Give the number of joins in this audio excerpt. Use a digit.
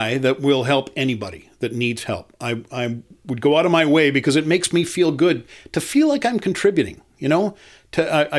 0